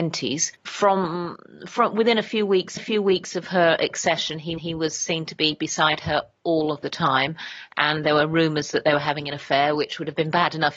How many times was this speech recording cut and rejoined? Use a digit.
2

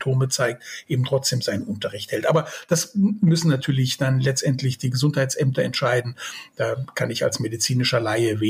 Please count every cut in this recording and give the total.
0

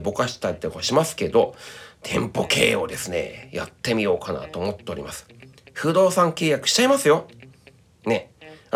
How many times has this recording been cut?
0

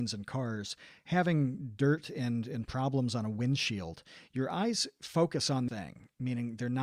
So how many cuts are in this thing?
1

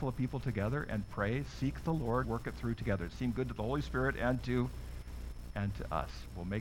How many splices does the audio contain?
1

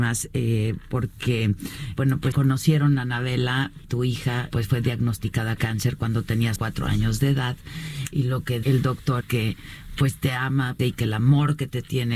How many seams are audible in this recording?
9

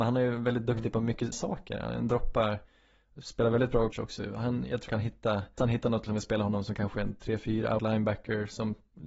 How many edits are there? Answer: 6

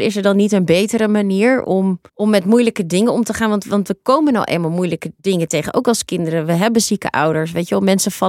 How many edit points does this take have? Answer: 2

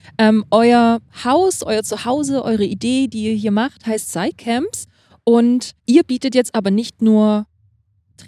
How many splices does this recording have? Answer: 1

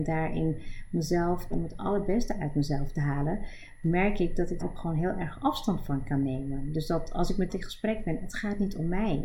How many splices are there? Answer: 3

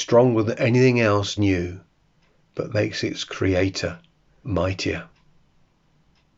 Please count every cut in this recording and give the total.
3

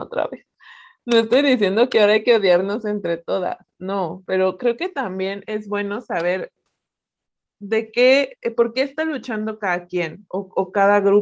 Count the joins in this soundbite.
0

